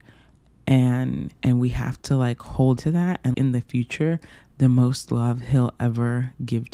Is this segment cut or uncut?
cut